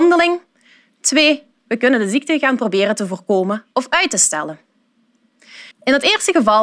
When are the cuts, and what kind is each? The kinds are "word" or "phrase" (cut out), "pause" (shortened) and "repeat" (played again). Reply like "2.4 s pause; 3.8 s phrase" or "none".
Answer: 5.7 s pause